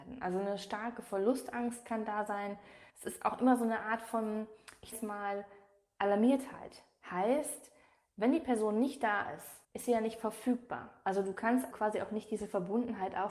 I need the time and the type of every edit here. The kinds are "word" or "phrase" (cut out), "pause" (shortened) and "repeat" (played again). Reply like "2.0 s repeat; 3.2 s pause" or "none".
2.9 s pause; 4.9 s word; 9.6 s pause; 11.7 s word